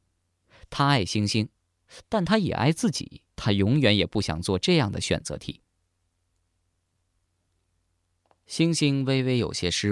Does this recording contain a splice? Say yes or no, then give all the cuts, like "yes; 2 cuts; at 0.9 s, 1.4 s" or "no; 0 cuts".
yes; 1 cut; at 3.3 s